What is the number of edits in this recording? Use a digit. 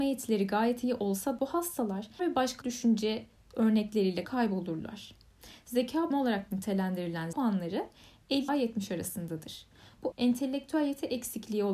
8